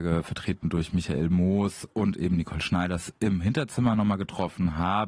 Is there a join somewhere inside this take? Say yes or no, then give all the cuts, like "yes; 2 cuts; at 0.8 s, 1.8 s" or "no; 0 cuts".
no; 0 cuts